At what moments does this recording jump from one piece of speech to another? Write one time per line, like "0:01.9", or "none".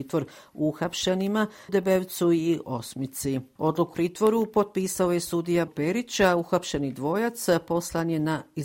0:01.7
0:02.6
0:03.9
0:05.7